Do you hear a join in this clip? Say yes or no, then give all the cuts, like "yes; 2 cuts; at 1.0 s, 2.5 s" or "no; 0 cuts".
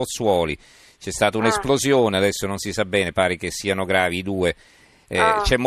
no; 0 cuts